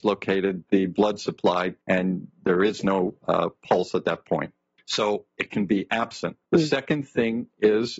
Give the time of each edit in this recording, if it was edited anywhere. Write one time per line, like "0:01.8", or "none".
0:01.8
0:04.8
0:06.4

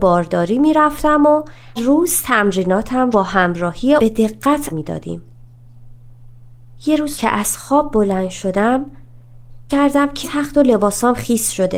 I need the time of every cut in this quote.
0:01.8
0:03.1
0:04.0
0:04.7
0:07.1
0:09.7
0:10.2

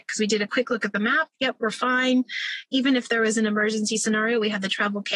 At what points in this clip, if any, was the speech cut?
0:01.3

